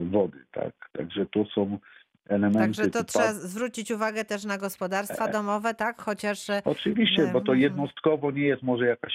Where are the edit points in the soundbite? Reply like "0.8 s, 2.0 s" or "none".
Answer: none